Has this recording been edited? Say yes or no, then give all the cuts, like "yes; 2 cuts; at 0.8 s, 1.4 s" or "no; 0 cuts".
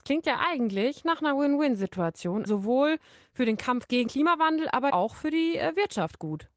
yes; 3 cuts; at 2.5 s, 4.1 s, 4.9 s